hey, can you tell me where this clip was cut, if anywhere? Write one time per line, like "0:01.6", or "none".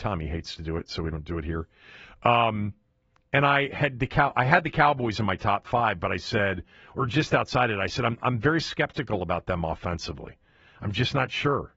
none

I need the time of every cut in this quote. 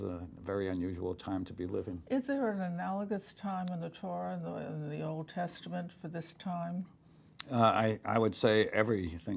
none

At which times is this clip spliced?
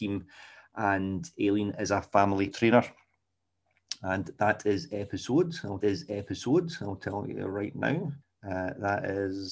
0:02.5
0:05.8
0:08.2

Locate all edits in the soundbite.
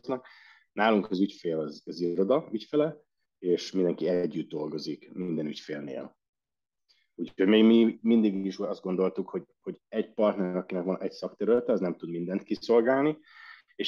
none

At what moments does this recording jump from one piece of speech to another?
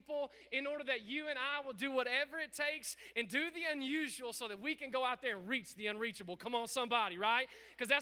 none

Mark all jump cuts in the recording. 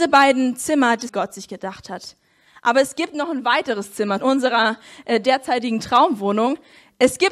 0:01.1
0:04.2

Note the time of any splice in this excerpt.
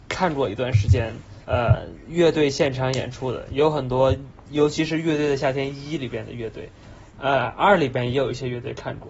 0:01.4

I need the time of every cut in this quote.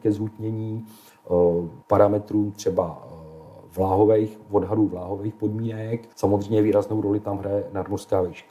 0:01.8
0:06.1

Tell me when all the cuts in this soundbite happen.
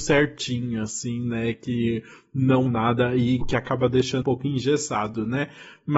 0:02.7
0:03.4
0:04.2

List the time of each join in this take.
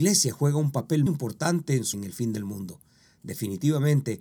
0:01.1
0:01.9

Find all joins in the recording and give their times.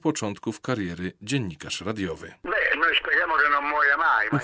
none

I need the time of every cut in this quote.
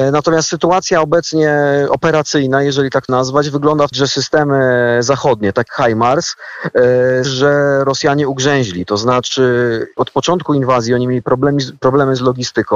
0:03.1
0:03.9
0:05.7
0:07.2
0:10.0

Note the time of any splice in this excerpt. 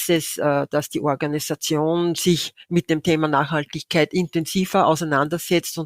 none

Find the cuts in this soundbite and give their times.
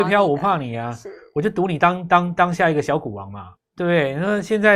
0:03.6

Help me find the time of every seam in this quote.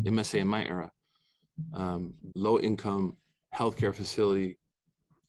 0:02.3

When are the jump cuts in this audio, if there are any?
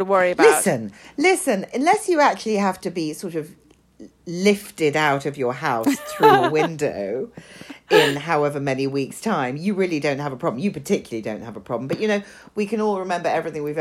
none

